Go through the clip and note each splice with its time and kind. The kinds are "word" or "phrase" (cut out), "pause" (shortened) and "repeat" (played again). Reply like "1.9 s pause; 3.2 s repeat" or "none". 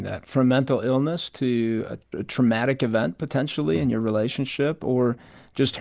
none